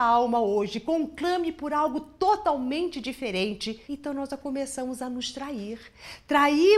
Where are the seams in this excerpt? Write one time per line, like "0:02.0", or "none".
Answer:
0:03.9